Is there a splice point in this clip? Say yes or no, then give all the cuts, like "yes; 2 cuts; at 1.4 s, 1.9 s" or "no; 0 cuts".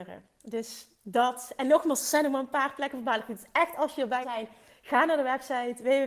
yes; 1 cut; at 4.2 s